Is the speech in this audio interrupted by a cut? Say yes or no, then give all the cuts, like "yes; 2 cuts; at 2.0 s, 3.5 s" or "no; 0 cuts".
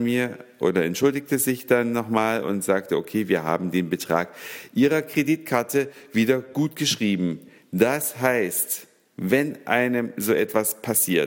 no; 0 cuts